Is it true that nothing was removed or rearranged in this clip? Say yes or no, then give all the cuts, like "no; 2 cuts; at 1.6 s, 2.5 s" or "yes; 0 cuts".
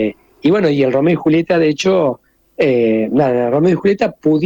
yes; 0 cuts